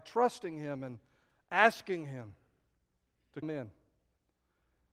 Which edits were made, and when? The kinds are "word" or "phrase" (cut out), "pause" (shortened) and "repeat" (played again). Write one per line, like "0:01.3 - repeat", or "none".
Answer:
0:03.4 - word

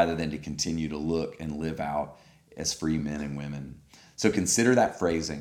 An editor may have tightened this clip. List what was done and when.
none

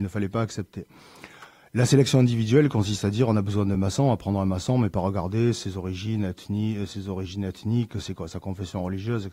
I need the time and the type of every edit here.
none

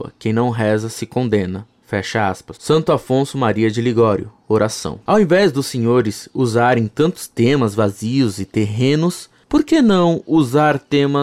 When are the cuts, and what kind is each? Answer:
0:02.6 - pause

